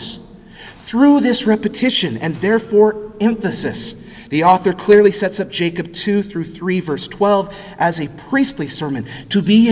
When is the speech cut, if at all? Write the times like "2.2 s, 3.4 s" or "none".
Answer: none